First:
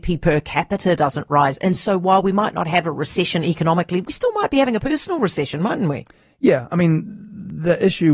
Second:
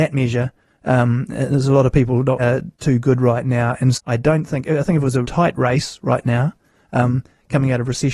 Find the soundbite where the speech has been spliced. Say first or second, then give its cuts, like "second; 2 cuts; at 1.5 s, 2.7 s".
second; 3 cuts; at 2.4 s, 3.9 s, 5.2 s